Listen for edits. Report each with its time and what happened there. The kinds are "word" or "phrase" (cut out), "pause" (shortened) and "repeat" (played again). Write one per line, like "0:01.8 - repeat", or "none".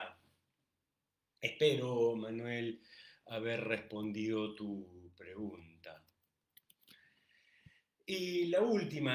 none